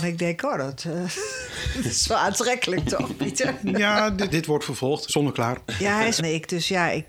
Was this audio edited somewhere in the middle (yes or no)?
yes